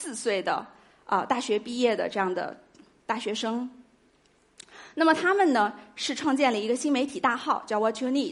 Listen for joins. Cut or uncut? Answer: uncut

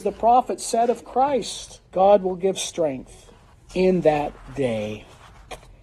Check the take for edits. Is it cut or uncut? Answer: cut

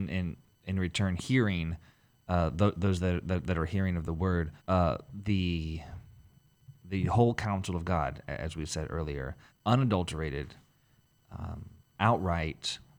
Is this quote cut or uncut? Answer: cut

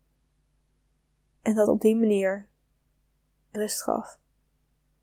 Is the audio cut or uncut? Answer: cut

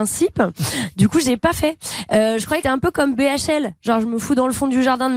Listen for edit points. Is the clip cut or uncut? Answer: cut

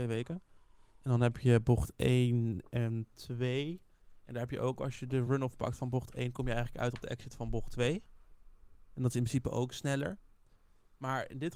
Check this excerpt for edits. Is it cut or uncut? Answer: uncut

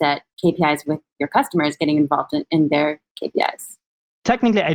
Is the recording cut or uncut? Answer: uncut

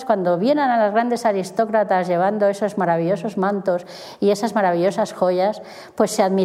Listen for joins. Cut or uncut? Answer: uncut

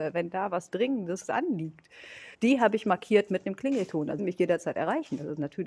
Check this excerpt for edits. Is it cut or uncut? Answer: cut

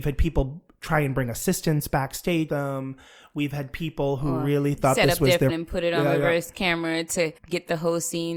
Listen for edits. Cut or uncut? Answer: cut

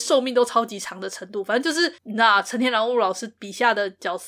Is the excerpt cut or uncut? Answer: cut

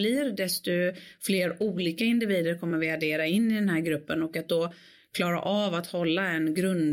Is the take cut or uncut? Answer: uncut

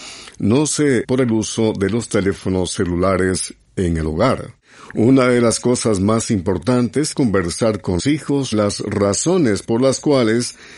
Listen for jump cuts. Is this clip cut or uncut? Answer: cut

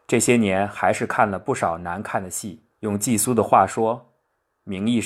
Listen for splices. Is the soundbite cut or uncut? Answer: cut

